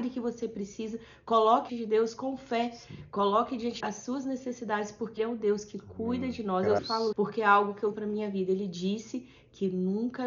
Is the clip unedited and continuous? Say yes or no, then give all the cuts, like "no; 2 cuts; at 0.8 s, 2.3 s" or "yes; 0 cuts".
no; 6 cuts; at 1.7 s, 3.8 s, 5.2 s, 6.8 s, 7.1 s, 7.9 s